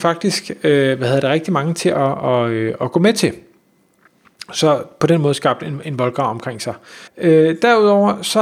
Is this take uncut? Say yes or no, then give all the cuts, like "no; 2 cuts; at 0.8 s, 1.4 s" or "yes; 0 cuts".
no; 1 cut; at 7.1 s